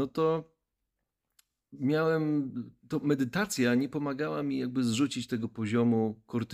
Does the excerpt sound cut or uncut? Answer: uncut